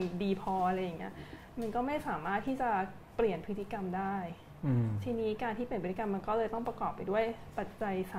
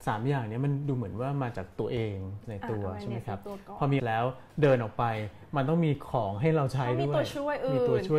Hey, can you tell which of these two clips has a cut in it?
second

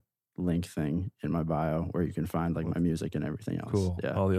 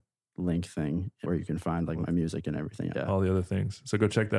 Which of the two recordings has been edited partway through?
second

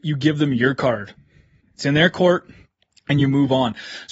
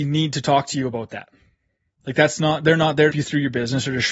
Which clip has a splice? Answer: second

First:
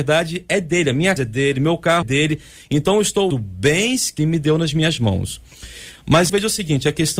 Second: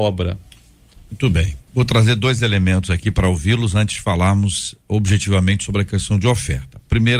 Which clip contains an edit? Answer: first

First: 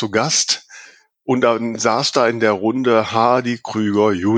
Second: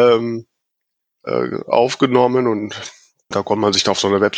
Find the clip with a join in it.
second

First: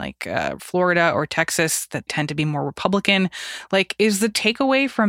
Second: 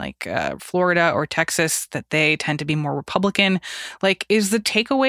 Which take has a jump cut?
first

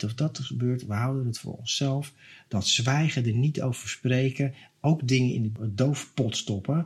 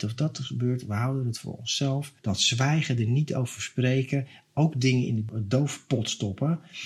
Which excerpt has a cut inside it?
second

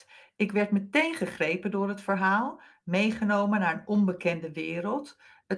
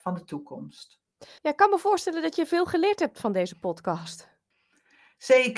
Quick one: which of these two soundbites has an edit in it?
second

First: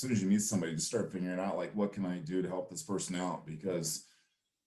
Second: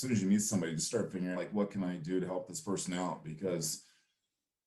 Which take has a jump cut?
second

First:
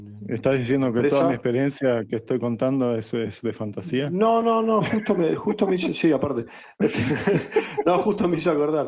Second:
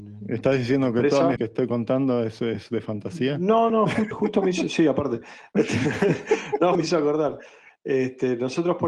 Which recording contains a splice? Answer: second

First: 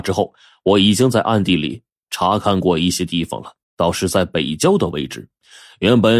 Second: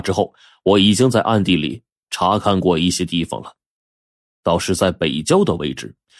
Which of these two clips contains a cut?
first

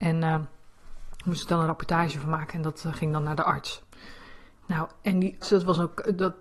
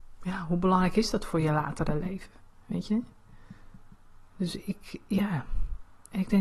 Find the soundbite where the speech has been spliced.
first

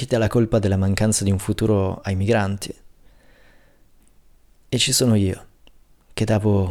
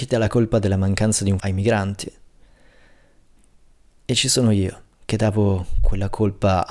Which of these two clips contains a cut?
second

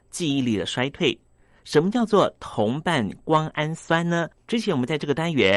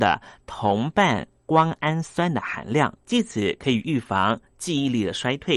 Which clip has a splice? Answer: second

